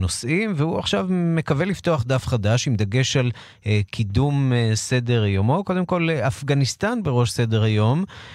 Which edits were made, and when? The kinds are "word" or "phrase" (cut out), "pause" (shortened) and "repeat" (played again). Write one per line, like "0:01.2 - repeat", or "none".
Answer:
none